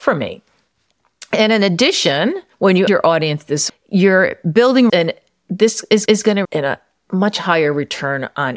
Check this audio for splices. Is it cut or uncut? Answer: cut